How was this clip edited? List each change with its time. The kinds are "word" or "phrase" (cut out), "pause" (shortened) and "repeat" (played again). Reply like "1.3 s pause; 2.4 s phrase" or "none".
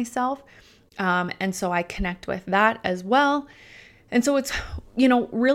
none